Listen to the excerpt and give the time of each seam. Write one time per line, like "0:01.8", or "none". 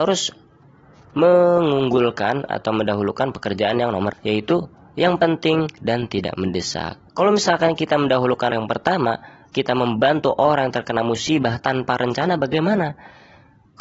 0:04.1
0:07.1
0:08.5